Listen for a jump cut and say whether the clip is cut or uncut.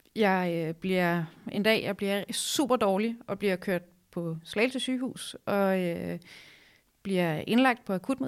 uncut